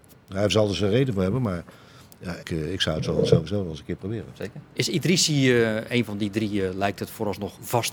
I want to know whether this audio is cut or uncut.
cut